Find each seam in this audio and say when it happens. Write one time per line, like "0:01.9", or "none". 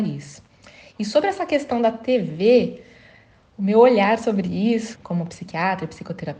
0:04.9